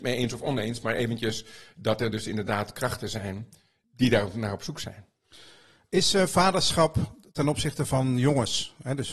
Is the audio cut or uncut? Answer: uncut